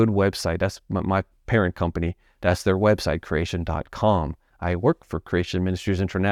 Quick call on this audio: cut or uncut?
uncut